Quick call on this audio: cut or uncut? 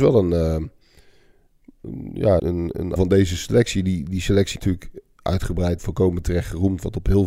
cut